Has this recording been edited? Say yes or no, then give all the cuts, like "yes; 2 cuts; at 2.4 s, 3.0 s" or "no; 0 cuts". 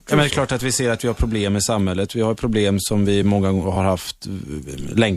no; 0 cuts